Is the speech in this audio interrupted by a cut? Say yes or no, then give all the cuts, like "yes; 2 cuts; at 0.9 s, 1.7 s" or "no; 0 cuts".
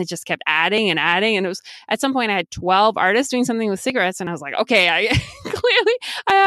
no; 0 cuts